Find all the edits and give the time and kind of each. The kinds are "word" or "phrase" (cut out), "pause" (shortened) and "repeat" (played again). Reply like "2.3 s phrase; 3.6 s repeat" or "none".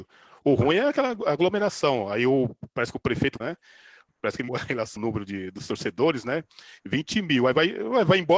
3.4 s word; 4.5 s word; 5.0 s word